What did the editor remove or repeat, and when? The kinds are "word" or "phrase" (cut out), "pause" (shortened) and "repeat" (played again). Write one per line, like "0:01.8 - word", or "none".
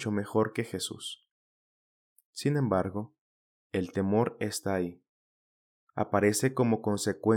none